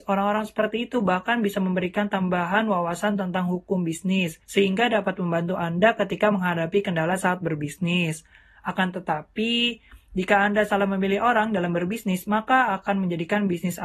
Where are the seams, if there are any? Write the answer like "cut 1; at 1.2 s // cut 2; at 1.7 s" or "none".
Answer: cut 1; at 4.4 s